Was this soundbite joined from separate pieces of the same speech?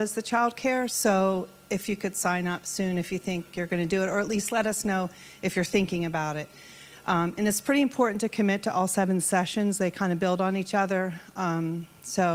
no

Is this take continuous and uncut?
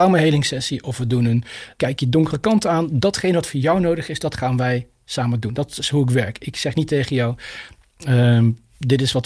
no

